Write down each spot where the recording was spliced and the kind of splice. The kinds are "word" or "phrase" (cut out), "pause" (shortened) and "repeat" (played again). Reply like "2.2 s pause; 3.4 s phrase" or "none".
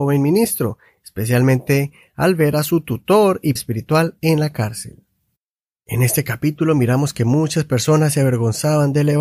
3.6 s word